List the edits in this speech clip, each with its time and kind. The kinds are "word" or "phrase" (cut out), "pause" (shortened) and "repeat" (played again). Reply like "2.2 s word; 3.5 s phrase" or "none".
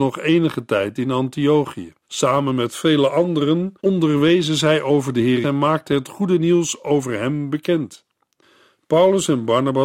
2.0 s pause; 3.8 s pause; 5.4 s word